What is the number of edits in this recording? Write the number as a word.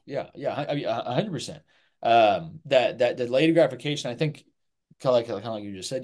zero